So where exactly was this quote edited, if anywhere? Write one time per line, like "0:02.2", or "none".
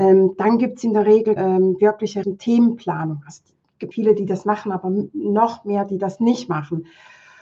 0:01.4
0:02.2
0:03.9